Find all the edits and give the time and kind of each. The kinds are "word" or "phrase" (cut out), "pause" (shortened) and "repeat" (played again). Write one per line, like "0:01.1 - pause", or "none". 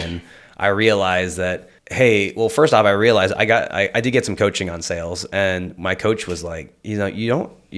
0:01.8 - pause